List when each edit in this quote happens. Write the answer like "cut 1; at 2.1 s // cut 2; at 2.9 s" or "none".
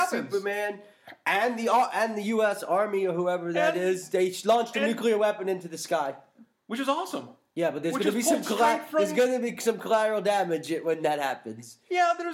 none